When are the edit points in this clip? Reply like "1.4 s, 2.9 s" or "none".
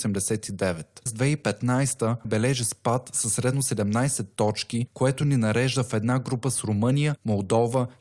1.1 s, 2.2 s